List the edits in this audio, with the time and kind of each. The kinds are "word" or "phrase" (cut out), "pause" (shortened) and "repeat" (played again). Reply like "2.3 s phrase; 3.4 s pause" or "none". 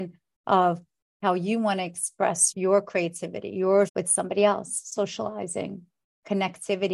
2.5 s word; 3.9 s word